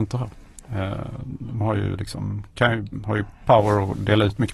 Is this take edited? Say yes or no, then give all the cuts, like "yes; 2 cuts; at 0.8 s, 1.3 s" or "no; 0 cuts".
no; 0 cuts